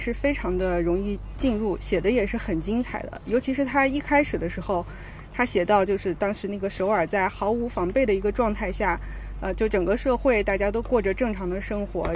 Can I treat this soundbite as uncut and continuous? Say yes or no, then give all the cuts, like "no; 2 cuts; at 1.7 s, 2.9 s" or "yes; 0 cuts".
yes; 0 cuts